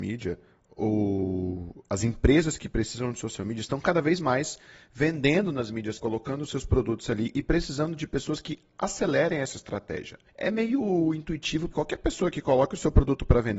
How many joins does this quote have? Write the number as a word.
three